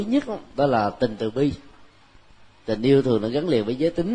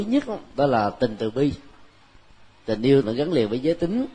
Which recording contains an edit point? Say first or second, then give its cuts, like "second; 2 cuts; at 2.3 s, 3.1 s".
second; 1 cut; at 3.0 s